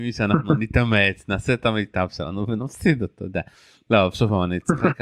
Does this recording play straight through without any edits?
yes; 0 cuts

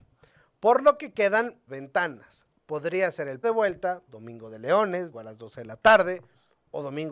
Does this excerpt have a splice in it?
yes; 4 cuts; at 1.7 s, 3.4 s, 4.1 s, 5.1 s

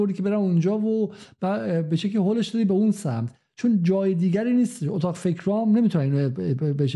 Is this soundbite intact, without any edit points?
yes; 0 cuts

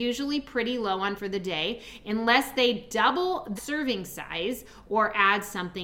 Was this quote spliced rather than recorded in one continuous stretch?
yes; 2 cuts; at 1.2 s, 3.6 s

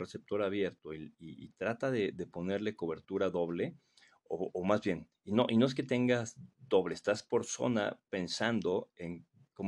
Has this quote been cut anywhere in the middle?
no; 0 cuts

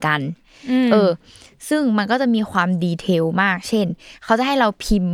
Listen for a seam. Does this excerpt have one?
no; 0 cuts

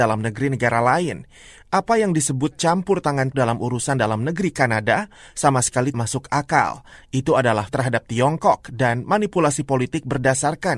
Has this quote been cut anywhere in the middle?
yes; 3 cuts; at 3.3 s, 5.9 s, 7.7 s

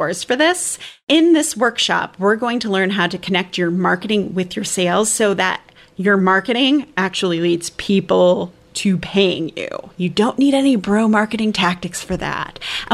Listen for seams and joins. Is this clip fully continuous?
yes; 0 cuts

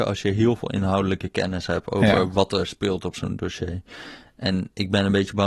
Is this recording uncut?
yes; 0 cuts

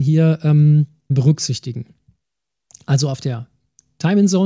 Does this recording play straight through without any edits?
no; 1 cut; at 1.1 s

